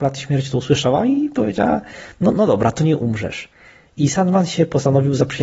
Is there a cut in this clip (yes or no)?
no